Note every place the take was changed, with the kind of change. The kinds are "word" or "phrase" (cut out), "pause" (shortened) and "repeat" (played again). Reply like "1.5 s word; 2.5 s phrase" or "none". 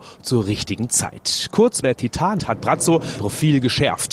1.8 s word; 2.4 s word; 3.2 s word